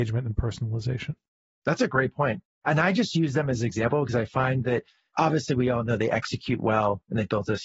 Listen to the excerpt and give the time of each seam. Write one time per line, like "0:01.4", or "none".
none